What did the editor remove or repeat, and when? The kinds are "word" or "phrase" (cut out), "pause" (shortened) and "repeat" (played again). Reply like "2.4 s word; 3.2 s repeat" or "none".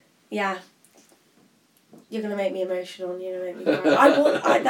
2.0 s pause